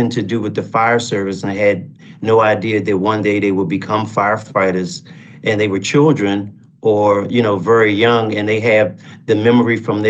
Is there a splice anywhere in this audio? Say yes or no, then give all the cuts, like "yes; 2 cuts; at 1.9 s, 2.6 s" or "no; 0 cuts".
no; 0 cuts